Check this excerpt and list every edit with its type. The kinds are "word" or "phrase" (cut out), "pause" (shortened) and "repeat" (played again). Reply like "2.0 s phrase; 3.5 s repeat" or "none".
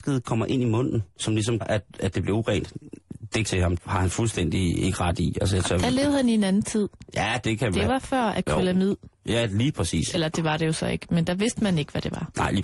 1.1 s pause; 1.6 s word; 3.5 s phrase; 3.8 s word